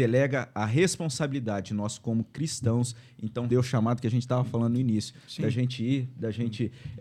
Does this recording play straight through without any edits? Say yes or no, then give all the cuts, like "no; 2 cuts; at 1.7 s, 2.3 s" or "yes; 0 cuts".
no; 1 cut; at 3.5 s